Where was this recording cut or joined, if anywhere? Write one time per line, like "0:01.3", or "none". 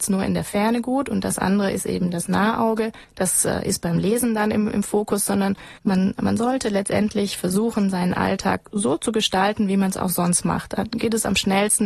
0:03.0
0:05.8